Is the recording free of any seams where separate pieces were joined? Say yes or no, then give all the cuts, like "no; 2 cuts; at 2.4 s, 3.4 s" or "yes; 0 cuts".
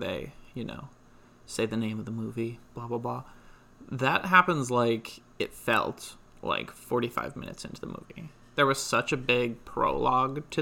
yes; 0 cuts